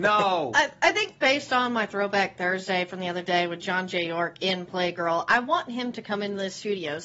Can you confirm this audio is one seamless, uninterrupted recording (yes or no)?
yes